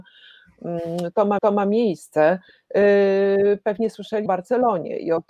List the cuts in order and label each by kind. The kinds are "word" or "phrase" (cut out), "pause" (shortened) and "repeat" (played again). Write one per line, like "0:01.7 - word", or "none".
0:01.4 - repeat
0:04.3 - word